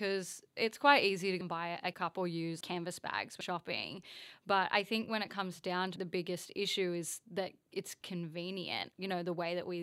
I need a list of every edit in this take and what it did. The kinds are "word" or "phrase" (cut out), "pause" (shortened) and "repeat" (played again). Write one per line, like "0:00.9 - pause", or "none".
0:01.4 - word
0:01.9 - word
0:02.6 - word
0:03.4 - word
0:06.0 - word

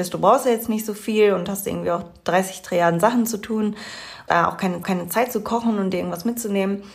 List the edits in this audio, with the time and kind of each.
0:04.3 - word
0:04.8 - repeat

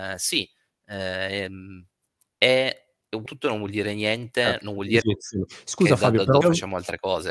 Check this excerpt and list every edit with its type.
0:03.3 - word
0:05.0 - word
0:06.4 - word

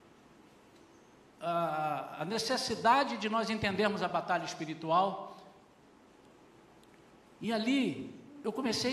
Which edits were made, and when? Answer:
none

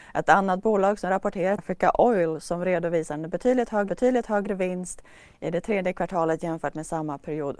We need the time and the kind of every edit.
0:01.6 - word
0:03.9 - repeat

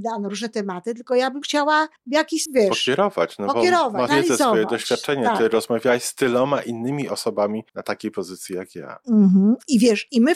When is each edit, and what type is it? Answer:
0:01.4 - word
0:02.0 - pause
0:02.5 - word
0:04.1 - word
0:07.7 - pause

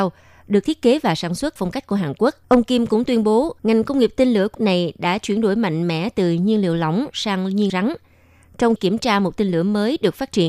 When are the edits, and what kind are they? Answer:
0:01.6 - word
0:02.4 - pause
0:03.6 - pause
0:04.5 - word
0:07.7 - word
0:08.8 - word

